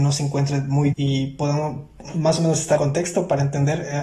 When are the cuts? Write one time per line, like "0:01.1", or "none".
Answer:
0:00.9
0:02.8